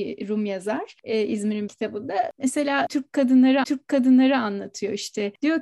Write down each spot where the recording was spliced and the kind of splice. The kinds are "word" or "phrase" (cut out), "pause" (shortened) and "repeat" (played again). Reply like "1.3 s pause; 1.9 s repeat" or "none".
1.7 s word; 3.6 s repeat